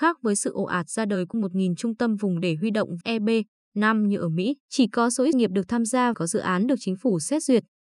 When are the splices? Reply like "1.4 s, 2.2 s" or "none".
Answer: 1.3 s, 3.0 s, 4.6 s, 5.3 s, 6.1 s